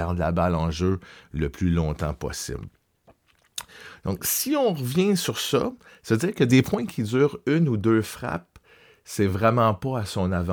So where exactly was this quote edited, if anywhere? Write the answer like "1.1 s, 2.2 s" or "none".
none